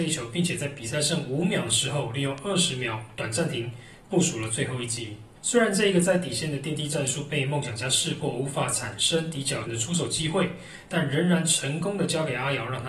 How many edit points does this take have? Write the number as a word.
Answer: two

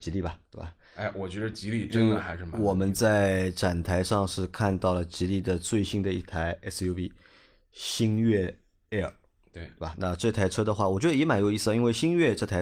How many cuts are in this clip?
zero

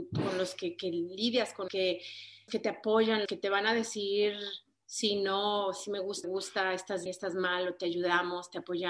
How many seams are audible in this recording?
five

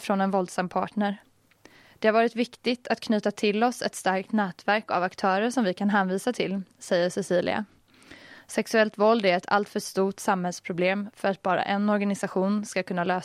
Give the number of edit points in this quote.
zero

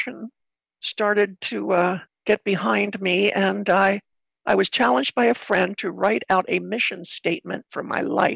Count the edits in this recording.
one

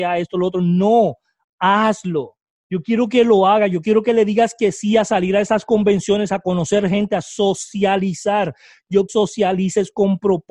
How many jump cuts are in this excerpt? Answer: two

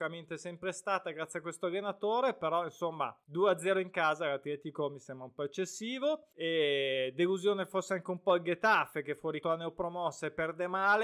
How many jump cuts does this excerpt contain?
three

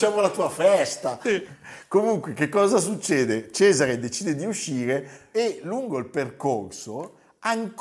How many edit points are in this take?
zero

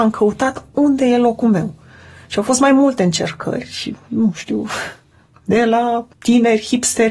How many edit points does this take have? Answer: zero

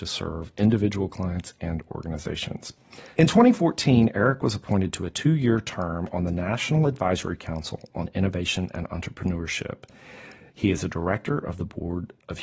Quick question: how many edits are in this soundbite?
one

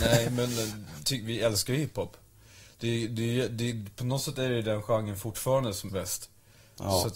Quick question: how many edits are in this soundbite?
two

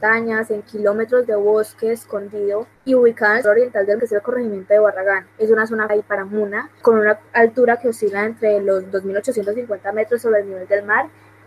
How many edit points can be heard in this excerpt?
seven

